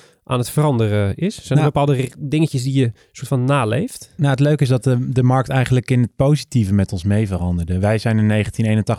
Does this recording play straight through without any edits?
yes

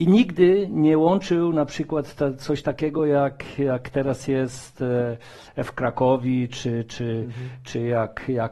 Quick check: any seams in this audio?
no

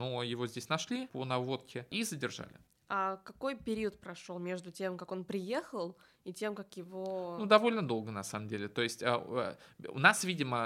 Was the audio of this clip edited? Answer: no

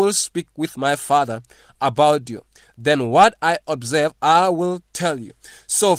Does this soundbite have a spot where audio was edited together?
no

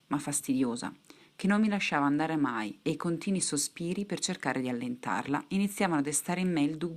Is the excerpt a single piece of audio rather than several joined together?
yes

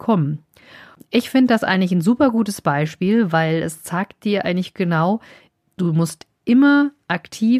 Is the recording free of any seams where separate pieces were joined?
yes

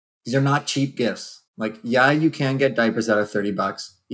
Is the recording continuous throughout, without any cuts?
no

